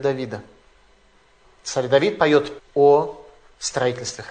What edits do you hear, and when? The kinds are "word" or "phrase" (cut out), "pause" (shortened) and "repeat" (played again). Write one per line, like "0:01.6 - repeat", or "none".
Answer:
0:02.6 - word

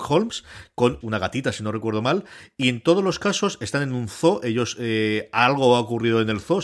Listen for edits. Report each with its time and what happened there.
0:01.0 - phrase

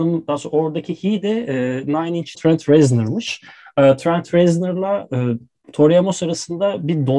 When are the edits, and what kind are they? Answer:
0:02.3 - word

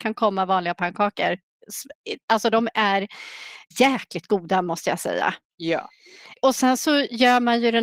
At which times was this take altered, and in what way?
0:03.7 - word

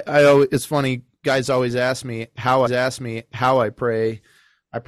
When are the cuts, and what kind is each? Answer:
0:02.7 - repeat

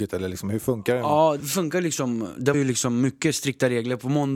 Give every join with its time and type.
0:01.4 - word
0:02.5 - word

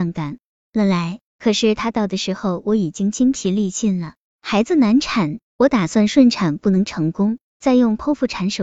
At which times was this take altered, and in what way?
0:01.3 - pause
0:05.4 - pause

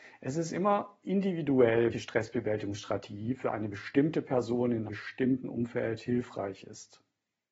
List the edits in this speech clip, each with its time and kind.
0:01.9 - word
0:04.9 - word

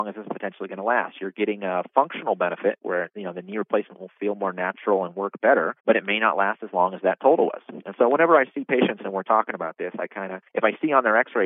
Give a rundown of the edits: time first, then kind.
0:05.8 - pause
0:10.5 - pause

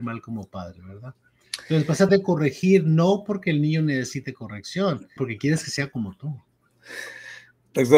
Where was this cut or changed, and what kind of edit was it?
0:02.1 - word
0:05.2 - word

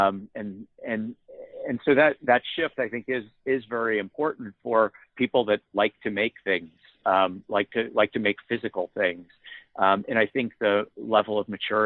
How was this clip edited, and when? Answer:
none

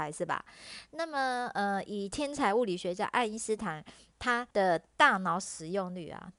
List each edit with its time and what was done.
0:04.5 - pause

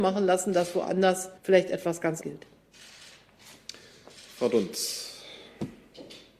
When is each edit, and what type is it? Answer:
0:01.4 - pause
0:02.2 - word

